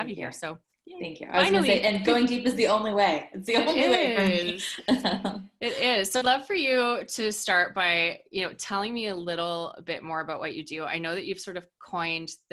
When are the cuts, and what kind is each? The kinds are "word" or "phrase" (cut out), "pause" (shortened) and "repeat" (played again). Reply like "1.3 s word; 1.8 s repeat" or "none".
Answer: 6.2 s word